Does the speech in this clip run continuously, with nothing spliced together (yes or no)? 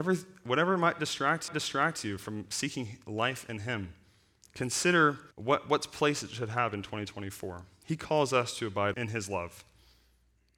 no